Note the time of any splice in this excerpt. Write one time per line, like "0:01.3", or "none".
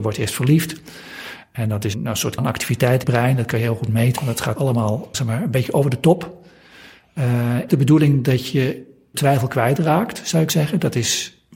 0:01.9
0:02.4
0:03.0
0:04.2
0:04.5
0:05.1
0:07.7
0:09.1
0:10.5